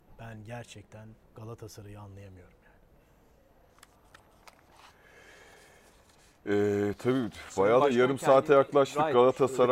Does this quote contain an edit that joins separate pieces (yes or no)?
yes